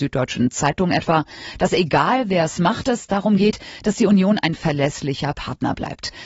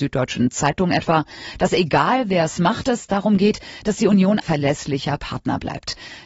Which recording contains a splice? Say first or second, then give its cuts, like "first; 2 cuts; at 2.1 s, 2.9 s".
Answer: second; 1 cut; at 4.4 s